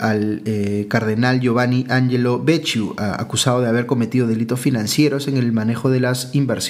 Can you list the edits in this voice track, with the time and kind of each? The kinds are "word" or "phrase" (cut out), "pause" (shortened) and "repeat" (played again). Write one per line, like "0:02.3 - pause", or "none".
none